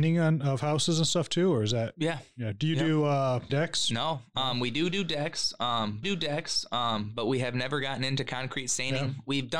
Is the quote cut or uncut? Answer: cut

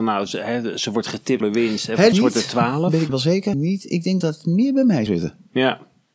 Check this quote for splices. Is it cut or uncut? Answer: cut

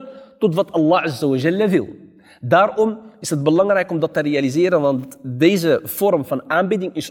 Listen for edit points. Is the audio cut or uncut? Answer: uncut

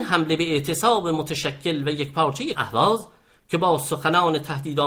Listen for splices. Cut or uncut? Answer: cut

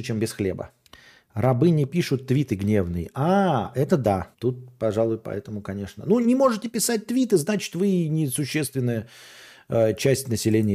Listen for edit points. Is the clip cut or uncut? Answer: cut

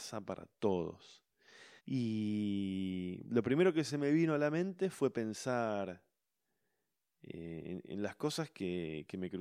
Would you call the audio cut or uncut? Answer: cut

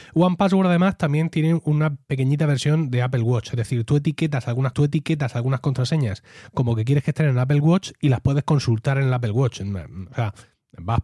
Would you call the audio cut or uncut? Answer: cut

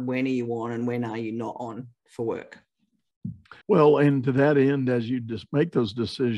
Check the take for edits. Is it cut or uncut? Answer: cut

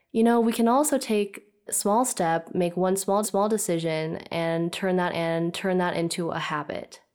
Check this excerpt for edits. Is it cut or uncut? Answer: cut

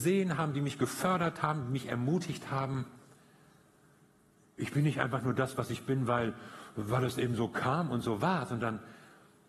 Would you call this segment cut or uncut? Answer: uncut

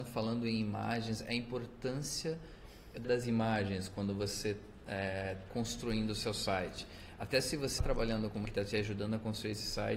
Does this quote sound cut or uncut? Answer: cut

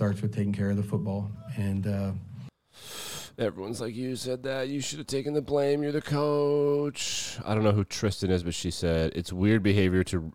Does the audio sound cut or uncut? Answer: uncut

